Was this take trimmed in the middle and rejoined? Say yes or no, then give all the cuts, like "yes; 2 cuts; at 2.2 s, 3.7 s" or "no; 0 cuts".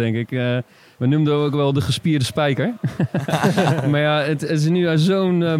no; 0 cuts